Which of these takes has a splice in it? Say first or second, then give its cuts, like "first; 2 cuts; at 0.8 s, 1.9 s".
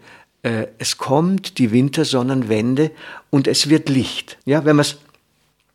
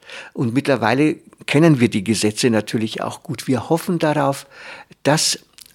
first; 1 cut; at 4.4 s